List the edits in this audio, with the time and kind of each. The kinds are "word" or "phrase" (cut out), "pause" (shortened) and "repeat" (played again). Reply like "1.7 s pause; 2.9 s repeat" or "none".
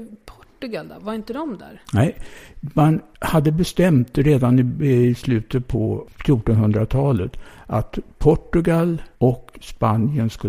9.1 s pause